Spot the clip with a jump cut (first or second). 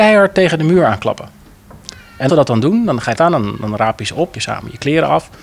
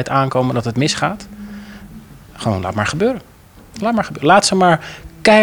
first